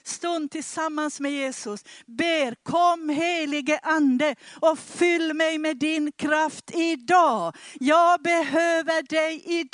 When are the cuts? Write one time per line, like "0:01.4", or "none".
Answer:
none